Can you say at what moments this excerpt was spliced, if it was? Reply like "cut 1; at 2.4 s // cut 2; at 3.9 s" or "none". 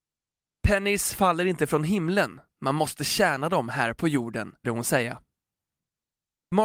cut 1; at 4.6 s